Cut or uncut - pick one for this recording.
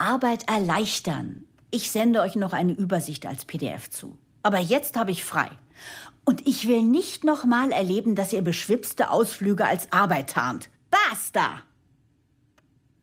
uncut